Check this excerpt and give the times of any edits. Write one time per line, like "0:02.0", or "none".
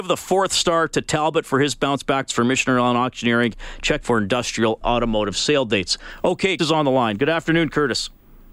0:02.3
0:04.0
0:04.8
0:06.6